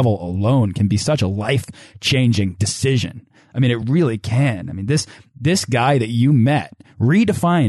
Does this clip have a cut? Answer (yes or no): no